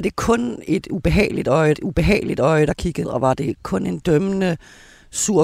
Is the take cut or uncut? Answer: cut